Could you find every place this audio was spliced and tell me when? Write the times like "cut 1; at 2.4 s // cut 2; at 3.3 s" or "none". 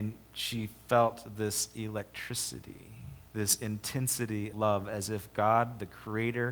cut 1; at 3.3 s // cut 2; at 4.5 s